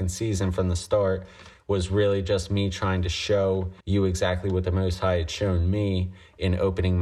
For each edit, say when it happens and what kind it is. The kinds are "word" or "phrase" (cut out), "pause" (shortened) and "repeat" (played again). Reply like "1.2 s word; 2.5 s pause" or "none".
3.8 s pause